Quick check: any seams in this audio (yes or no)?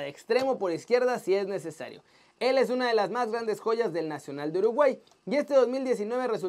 no